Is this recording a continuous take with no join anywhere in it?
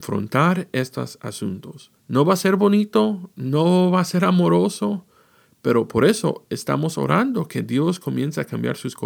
no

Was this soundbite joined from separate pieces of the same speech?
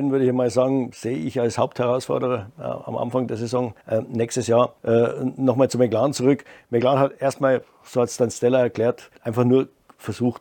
yes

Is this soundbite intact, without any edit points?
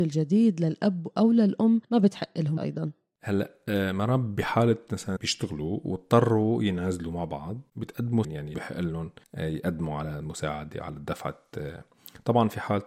no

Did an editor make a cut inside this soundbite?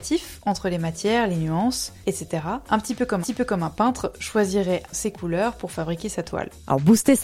yes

